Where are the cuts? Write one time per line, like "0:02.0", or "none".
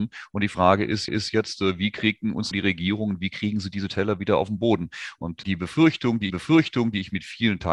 0:01.1
0:02.5
0:05.4
0:06.3

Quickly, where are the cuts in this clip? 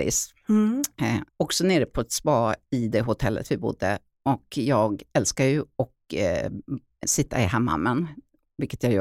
0:01.3
0:07.0

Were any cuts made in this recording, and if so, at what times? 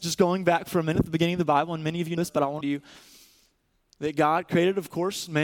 0:02.2
0:02.6

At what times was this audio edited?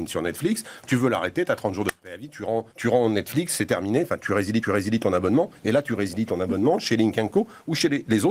0:02.7
0:04.2
0:04.6

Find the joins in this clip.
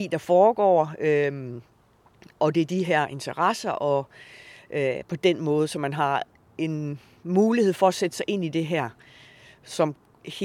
none

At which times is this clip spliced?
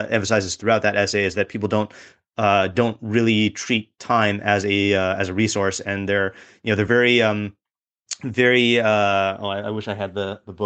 none

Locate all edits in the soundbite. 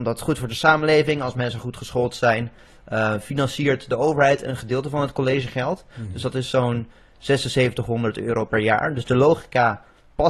none

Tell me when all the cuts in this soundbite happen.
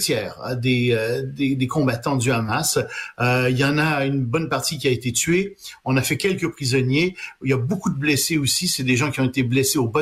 none

